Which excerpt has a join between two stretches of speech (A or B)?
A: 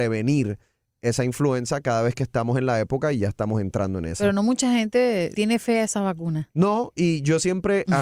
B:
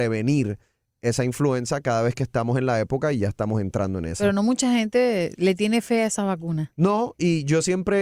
A